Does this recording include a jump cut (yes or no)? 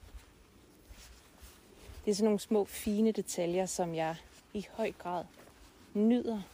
yes